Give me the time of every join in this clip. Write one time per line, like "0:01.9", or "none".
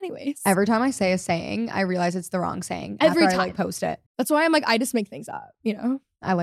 0:04.1